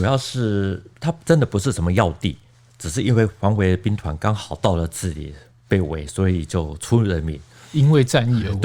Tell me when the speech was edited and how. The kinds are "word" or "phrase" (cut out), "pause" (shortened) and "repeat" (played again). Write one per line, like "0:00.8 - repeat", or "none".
none